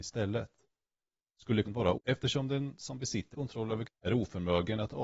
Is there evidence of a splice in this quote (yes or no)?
yes